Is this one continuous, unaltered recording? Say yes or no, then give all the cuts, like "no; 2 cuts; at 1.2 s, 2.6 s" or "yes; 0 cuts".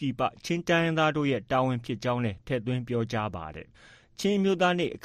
no; 1 cut; at 3.7 s